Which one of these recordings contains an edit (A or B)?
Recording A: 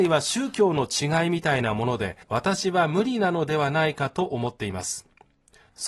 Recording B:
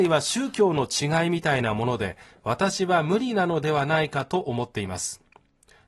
A